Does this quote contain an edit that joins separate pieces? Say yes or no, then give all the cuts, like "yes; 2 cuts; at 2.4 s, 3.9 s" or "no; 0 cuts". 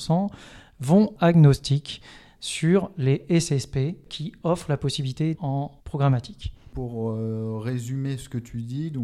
yes; 4 cuts; at 1.2 s, 4.1 s, 5.3 s, 5.8 s